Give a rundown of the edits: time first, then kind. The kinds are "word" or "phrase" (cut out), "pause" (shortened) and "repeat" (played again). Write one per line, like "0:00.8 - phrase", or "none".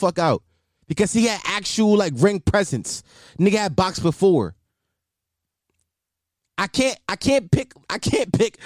none